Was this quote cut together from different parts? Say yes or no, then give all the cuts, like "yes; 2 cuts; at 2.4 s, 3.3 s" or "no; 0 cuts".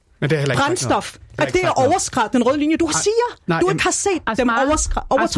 yes; 1 cut; at 1.4 s